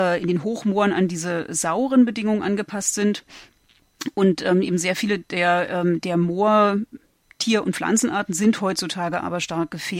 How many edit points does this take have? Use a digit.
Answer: 0